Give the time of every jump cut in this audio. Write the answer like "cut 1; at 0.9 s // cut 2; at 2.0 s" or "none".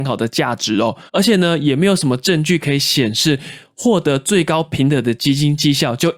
cut 1; at 1.1 s